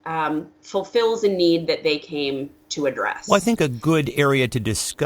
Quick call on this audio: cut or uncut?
uncut